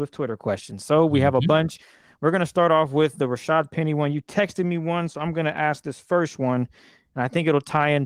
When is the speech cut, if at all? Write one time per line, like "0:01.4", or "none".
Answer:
none